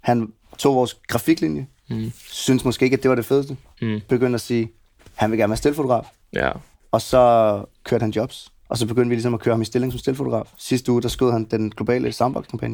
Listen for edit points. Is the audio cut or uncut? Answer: cut